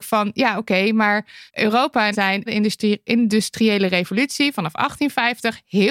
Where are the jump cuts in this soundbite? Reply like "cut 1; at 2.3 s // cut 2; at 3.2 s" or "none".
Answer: cut 1; at 1.5 s // cut 2; at 2.1 s // cut 3; at 2.5 s

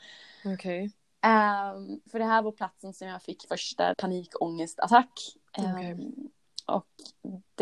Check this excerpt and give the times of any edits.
cut 1; at 2.1 s // cut 2; at 3.5 s // cut 3; at 3.9 s

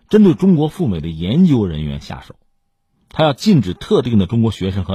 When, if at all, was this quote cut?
none

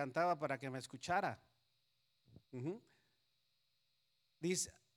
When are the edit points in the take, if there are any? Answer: cut 1; at 2.4 s

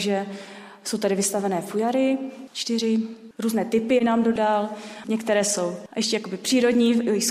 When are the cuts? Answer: none

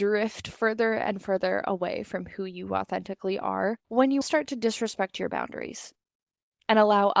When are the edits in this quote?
cut 1; at 3.8 s // cut 2; at 4.2 s

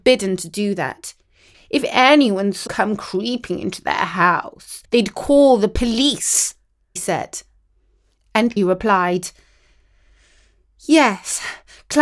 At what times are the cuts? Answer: cut 1; at 2.7 s // cut 2; at 4.8 s // cut 3; at 7.0 s // cut 4; at 8.6 s

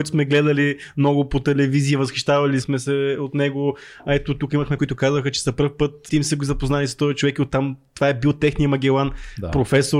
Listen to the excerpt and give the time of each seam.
cut 1; at 2.6 s // cut 2; at 4.8 s // cut 3; at 6.1 s

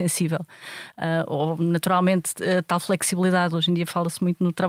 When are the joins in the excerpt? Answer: none

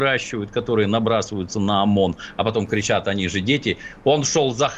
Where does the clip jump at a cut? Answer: none

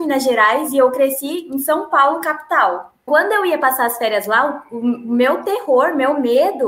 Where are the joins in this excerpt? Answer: cut 1; at 3.1 s

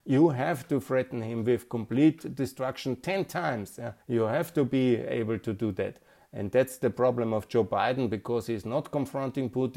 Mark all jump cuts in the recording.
cut 1; at 4.0 s

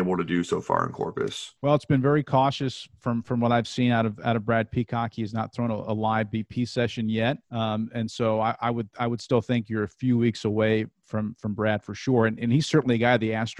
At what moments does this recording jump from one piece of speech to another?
cut 1; at 1.6 s // cut 2; at 7.4 s

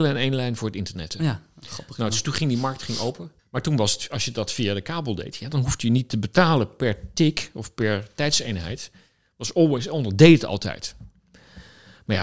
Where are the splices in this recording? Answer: cut 1; at 3.4 s

